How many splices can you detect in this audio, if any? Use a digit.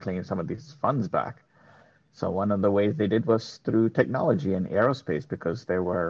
0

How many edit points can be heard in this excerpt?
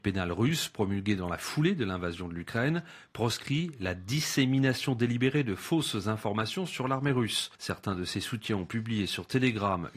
1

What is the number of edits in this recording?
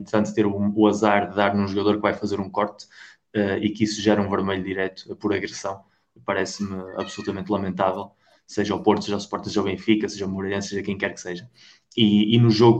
0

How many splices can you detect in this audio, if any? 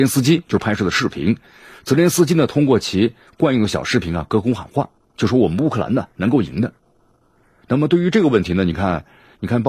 0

